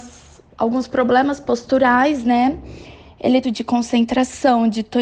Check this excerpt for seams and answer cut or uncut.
cut